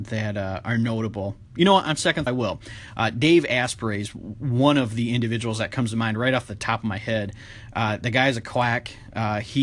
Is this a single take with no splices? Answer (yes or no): no